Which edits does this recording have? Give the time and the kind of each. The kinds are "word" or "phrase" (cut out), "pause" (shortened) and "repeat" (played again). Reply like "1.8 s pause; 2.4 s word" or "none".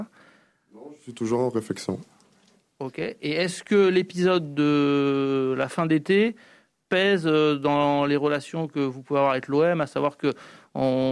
none